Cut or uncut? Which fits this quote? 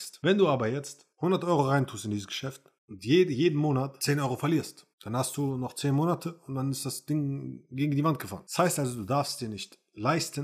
cut